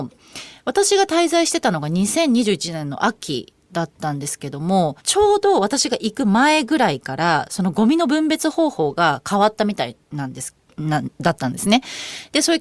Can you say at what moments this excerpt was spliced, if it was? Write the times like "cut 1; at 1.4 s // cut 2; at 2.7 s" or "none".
cut 1; at 5.0 s // cut 2; at 10.0 s

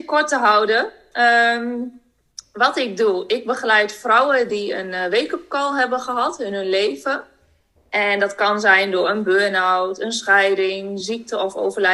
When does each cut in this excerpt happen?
none

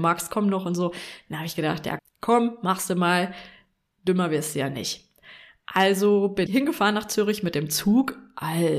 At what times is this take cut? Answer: cut 1; at 2.0 s // cut 2; at 6.5 s

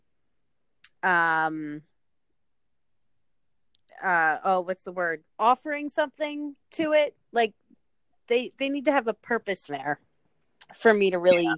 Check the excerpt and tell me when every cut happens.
cut 1; at 0.9 s // cut 2; at 5.3 s // cut 3; at 9.7 s

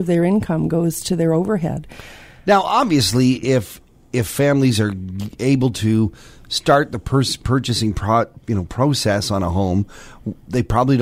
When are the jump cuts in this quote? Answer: none

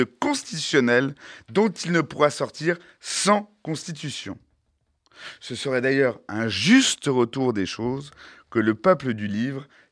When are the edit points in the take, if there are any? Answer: none

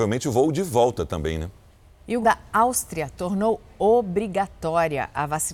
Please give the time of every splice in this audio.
cut 1; at 2.2 s

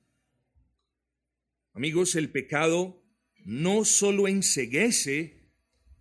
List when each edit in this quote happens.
none

